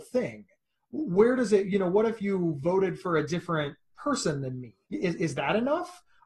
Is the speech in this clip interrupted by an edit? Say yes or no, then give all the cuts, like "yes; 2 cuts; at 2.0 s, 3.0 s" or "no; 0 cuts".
yes; 1 cut; at 4.8 s